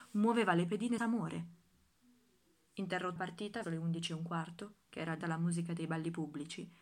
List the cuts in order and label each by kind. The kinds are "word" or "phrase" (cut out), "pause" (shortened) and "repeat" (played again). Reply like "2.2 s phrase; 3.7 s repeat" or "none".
1.0 s word; 3.2 s word; 3.6 s word; 4.9 s word; 5.2 s word